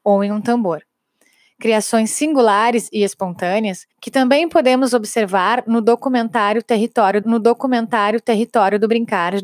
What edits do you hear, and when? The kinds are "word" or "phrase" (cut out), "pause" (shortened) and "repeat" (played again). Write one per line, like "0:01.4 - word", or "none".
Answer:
0:03.9 - pause
0:07.2 - repeat